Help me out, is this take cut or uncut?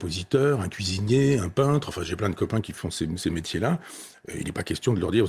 uncut